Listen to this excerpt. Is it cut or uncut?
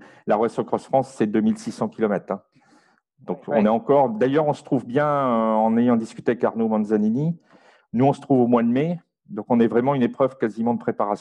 uncut